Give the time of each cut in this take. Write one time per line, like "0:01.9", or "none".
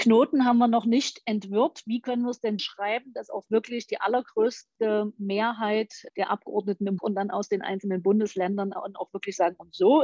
0:02.6
0:07.0